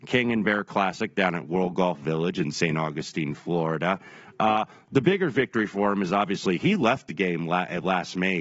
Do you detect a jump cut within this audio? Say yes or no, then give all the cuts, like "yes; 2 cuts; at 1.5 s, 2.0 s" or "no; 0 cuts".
no; 0 cuts